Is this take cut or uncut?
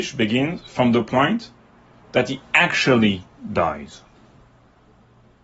uncut